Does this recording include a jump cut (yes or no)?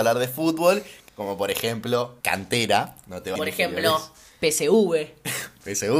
yes